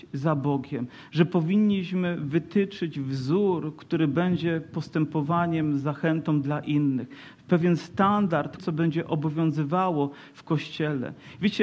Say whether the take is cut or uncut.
cut